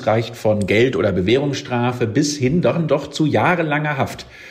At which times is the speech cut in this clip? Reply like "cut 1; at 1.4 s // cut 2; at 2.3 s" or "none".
none